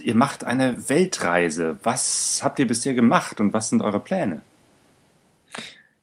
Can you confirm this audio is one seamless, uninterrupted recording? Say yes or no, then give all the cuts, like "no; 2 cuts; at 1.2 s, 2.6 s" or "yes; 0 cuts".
yes; 0 cuts